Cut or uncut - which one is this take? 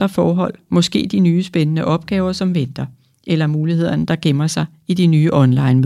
uncut